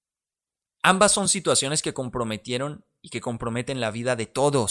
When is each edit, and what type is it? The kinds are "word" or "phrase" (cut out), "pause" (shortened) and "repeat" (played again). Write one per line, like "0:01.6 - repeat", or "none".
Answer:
none